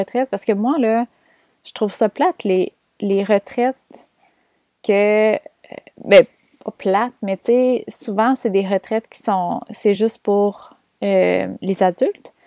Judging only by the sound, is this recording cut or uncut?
uncut